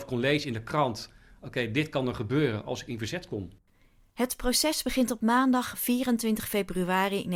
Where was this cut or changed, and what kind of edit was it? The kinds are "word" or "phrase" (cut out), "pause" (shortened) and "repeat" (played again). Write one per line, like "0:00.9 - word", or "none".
none